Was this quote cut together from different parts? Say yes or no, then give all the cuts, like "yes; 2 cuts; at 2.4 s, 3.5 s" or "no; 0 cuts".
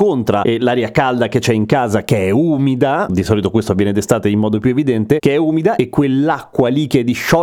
no; 0 cuts